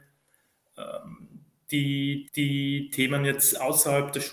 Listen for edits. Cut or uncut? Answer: cut